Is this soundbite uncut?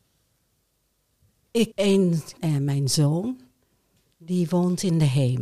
no; 2 cuts; at 1.7 s, 2.4 s

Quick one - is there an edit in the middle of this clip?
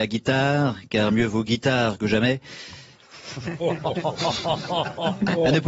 no; 0 cuts

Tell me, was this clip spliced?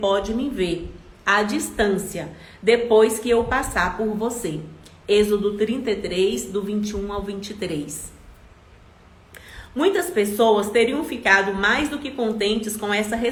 no; 0 cuts

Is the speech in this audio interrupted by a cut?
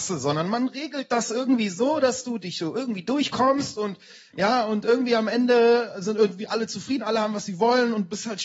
no; 0 cuts

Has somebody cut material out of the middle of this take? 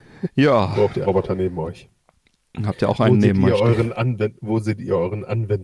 yes; 1 cut; at 1.0 s

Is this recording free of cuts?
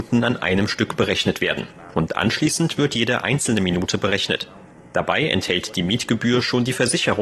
yes; 0 cuts

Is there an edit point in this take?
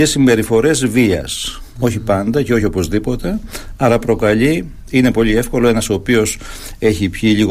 no; 0 cuts

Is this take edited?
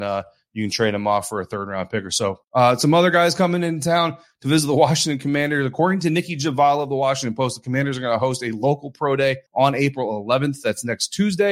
yes; 2 cuts; at 2.4 s, 9.5 s

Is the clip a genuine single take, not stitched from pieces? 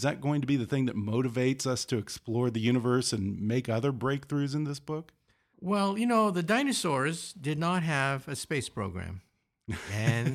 yes; 0 cuts

